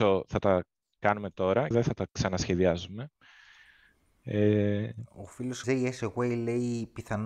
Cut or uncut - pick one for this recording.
cut